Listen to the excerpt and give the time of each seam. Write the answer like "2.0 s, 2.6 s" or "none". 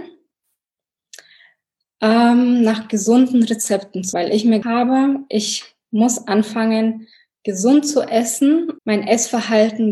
4.1 s, 4.6 s, 8.8 s